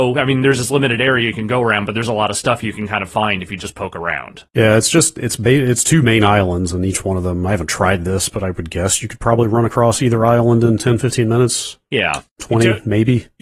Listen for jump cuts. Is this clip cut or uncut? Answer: cut